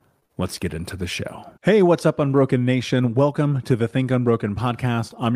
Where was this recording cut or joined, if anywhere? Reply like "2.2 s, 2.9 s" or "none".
1.6 s